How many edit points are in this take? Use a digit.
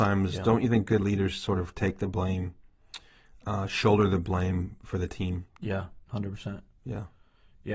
1